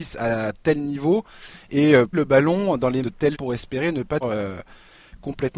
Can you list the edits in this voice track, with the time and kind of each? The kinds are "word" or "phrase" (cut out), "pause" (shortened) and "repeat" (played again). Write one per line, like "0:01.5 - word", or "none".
0:02.1 - word
0:03.0 - word
0:03.3 - word
0:04.2 - phrase